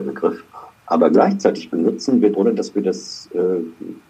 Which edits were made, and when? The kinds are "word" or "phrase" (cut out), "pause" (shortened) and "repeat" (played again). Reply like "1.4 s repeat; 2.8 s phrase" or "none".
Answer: 2.3 s word